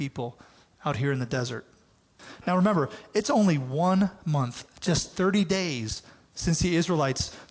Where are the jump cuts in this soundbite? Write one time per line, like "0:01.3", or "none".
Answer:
none